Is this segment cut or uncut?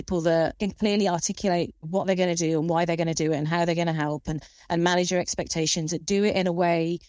cut